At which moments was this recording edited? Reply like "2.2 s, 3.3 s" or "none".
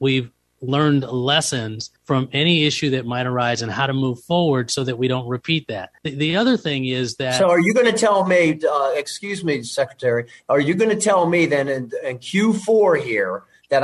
2.0 s, 6.0 s